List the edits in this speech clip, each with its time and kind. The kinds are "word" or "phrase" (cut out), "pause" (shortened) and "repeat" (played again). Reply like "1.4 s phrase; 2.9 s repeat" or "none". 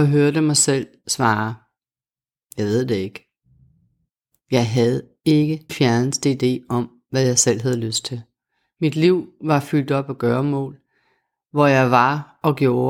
5.7 s word